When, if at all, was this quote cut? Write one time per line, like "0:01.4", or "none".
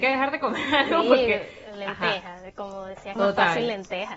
0:03.2